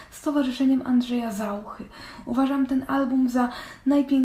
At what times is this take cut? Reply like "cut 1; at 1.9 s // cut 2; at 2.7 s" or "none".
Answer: none